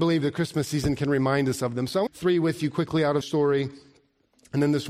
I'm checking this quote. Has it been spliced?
yes; 2 cuts; at 2.1 s, 3.2 s

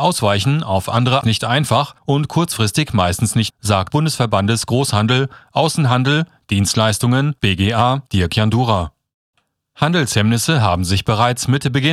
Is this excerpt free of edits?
no; 6 cuts; at 1.2 s, 2.0 s, 3.5 s, 3.9 s, 7.4 s, 8.1 s

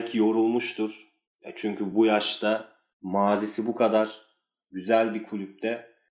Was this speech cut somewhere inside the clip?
no; 0 cuts

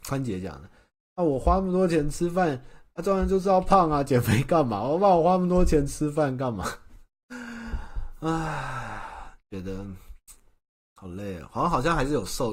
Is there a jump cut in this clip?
no; 0 cuts

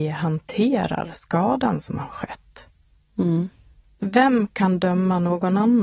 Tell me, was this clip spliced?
no; 0 cuts

